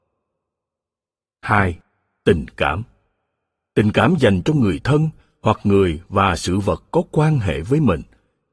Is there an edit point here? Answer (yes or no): no